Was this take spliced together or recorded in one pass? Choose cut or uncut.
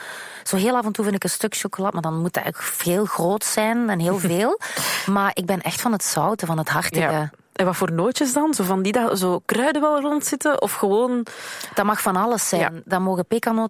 uncut